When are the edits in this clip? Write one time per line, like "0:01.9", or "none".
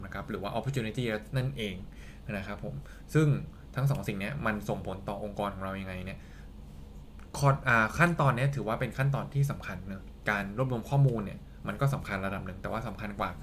0:01.3

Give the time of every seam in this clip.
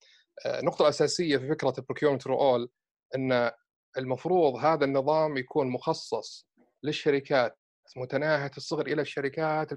none

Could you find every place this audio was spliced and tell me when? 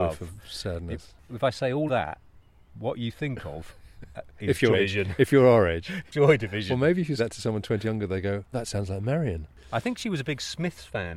0:01.9
0:04.7
0:06.1
0:07.2
0:07.8
0:08.5

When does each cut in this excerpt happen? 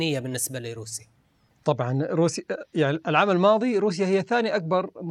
none

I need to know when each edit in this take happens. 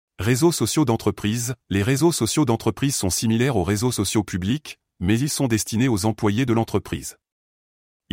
none

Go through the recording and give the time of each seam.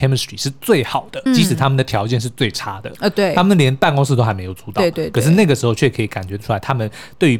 0:01.3

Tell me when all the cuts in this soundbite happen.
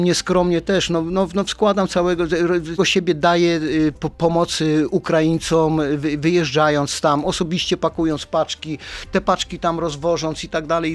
0:02.8
0:03.9

